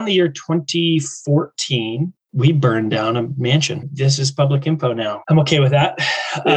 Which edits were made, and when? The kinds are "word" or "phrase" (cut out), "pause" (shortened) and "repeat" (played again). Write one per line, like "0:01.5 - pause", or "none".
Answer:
0:02.2 - word